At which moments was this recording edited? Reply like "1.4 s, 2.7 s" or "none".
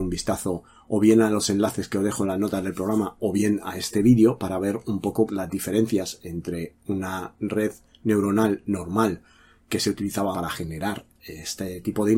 5.3 s, 10.3 s